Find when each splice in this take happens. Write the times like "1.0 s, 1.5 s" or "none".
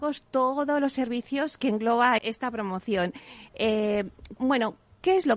2.2 s, 4.4 s